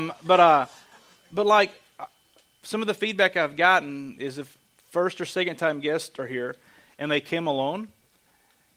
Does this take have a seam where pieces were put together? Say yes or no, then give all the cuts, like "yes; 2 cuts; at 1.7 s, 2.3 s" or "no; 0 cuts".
no; 0 cuts